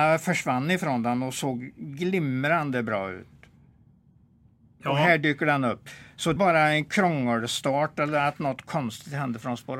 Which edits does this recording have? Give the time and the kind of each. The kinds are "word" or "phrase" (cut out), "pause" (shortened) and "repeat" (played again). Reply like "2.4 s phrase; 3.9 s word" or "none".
6.4 s phrase